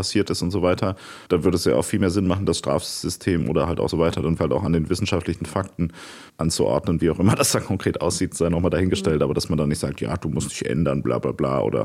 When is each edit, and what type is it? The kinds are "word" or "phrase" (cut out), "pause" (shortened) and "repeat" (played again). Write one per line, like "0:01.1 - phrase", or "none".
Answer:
0:01.3 - pause
0:03.9 - phrase
0:04.4 - word
0:06.3 - word